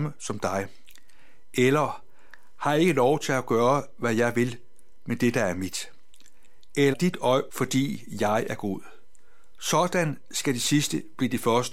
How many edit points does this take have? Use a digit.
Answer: 2